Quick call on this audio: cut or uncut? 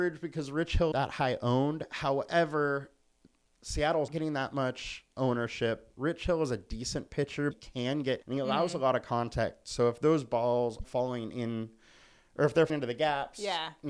cut